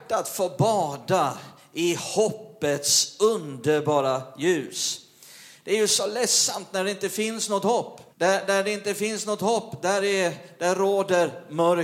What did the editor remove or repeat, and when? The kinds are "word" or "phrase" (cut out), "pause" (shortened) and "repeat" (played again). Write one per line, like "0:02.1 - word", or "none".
0:08.1 - pause

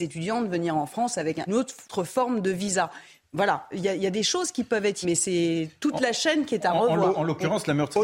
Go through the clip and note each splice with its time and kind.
0:01.5 - word
0:01.9 - pause
0:05.0 - word

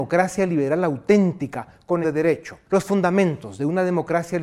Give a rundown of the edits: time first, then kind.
0:02.0 - word
0:02.6 - pause

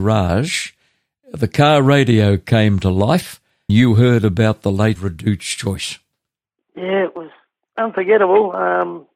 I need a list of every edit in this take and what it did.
0:03.7 - word
0:05.0 - phrase

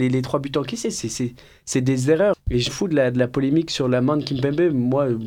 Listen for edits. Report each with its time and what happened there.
0:02.3 - word
0:02.7 - word

